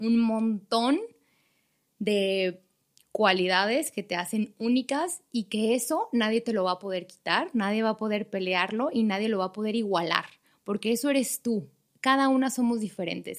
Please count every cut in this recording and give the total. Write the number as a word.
zero